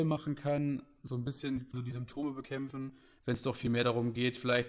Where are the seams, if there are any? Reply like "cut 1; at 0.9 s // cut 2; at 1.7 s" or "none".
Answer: cut 1; at 1.7 s